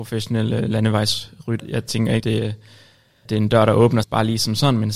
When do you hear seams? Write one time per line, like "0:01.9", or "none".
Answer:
0:01.6
0:02.2
0:03.3
0:04.0